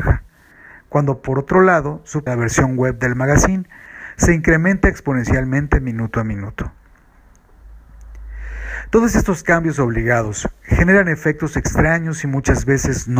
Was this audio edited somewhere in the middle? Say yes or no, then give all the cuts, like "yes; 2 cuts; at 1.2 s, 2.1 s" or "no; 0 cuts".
yes; 1 cut; at 2.3 s